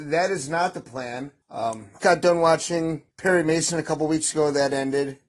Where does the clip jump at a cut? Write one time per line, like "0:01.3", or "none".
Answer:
0:01.4
0:02.0
0:03.1